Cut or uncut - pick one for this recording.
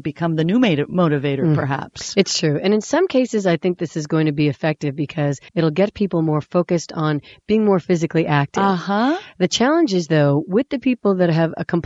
cut